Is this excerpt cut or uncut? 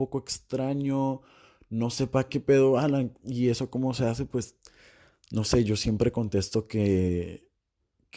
uncut